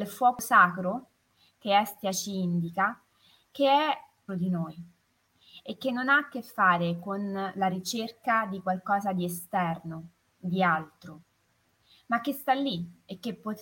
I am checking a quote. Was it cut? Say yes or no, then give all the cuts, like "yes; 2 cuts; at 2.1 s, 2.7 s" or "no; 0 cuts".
yes; 1 cut; at 4.3 s